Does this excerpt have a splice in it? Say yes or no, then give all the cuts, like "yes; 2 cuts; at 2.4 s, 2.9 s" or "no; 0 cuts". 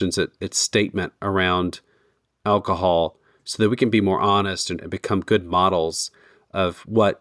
yes; 1 cut; at 4.8 s